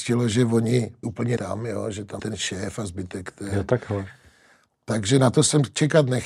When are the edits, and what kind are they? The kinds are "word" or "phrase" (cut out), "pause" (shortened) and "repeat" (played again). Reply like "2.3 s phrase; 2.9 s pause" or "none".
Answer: 1.0 s word; 1.4 s word; 2.2 s word